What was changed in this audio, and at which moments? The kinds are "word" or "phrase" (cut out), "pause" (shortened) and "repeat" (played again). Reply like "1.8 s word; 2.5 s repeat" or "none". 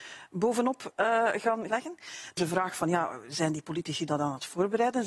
1.7 s word; 2.4 s word